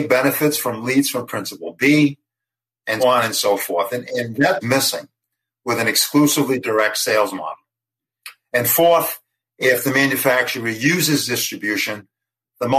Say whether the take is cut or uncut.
cut